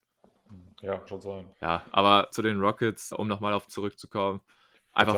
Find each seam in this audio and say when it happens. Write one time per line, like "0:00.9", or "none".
0:01.1
0:01.5
0:02.3
0:03.1
0:03.7